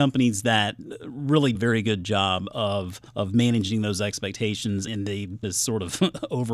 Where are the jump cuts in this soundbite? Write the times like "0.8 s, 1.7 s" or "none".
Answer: 1.6 s, 3.1 s, 4.9 s, 5.4 s